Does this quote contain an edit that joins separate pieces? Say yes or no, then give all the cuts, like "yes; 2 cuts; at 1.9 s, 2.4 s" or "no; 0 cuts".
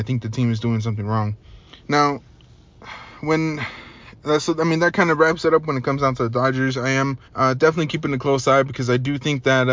yes; 2 cuts; at 1.7 s, 7.2 s